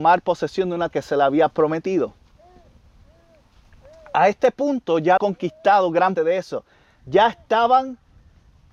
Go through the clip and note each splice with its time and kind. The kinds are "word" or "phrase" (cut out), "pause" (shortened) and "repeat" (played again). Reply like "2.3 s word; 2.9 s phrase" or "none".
0.9 s word; 5.2 s word; 6.2 s word